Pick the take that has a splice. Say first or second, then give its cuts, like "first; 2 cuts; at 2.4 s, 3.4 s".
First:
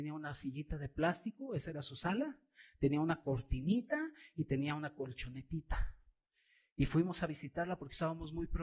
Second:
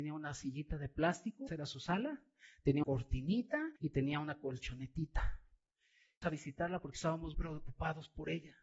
second; 5 cuts; at 1.5 s, 2.8 s, 3.8 s, 6.2 s, 7.3 s